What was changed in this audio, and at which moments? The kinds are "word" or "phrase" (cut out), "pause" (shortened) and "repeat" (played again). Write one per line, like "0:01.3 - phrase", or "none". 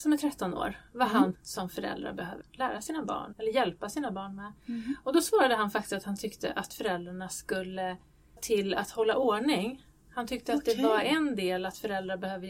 0:01.3 - phrase
0:02.4 - word
0:03.3 - word
0:08.4 - phrase